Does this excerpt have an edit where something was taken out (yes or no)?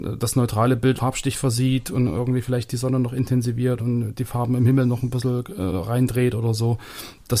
yes